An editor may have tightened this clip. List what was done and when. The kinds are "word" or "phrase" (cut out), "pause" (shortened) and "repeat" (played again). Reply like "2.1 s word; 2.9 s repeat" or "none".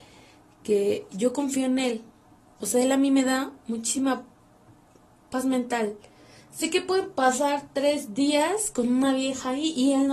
none